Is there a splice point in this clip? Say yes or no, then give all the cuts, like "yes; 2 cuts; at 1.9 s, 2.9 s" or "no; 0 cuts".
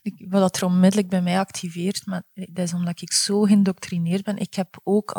no; 0 cuts